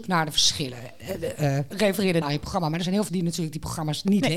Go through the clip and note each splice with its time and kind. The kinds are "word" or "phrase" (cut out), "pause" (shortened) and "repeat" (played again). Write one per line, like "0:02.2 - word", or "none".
0:01.7 - word
0:02.2 - phrase
0:03.1 - word